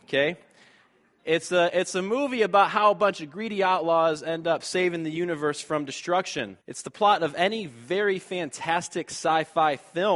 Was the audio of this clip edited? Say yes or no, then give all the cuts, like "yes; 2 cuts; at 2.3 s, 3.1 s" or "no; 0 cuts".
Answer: yes; 1 cut; at 6.6 s